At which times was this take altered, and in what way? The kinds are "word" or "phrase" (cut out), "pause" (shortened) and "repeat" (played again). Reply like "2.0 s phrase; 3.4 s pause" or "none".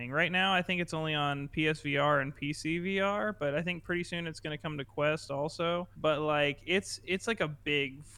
5.9 s pause